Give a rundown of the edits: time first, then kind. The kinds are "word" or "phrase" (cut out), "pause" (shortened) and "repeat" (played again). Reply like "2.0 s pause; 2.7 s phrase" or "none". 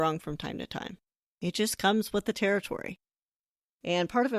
none